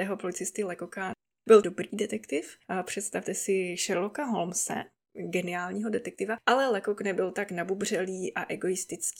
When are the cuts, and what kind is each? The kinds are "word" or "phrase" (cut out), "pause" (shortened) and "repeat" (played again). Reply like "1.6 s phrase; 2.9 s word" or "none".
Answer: none